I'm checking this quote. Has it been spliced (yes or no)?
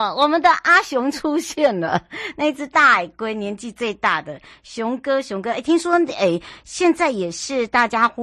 no